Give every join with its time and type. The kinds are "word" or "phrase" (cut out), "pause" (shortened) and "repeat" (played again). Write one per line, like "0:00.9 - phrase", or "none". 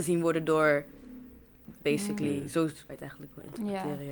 0:01.8 - word
0:02.9 - word